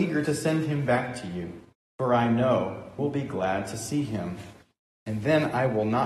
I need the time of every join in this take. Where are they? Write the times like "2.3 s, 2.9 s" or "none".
1.7 s, 3.0 s